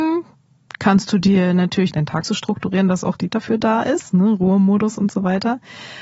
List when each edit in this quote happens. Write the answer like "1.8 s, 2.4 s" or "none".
3.3 s